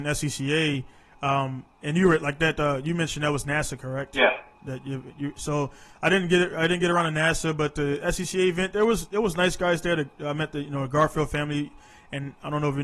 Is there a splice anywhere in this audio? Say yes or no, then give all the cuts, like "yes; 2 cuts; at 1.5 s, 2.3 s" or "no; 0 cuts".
no; 0 cuts